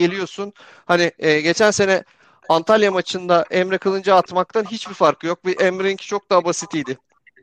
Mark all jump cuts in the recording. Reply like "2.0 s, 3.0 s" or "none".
none